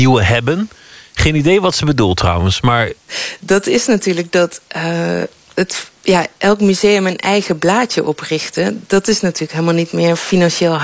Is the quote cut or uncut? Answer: cut